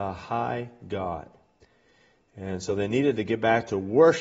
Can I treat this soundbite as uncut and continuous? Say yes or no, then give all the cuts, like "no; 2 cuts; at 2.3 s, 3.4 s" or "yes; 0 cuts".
yes; 0 cuts